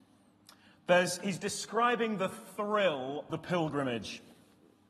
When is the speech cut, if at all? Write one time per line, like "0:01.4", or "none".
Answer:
0:03.3